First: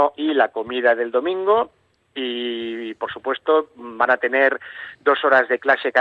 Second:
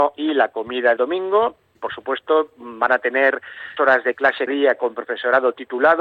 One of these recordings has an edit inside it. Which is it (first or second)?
second